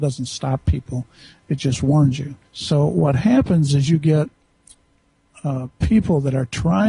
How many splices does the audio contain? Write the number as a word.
one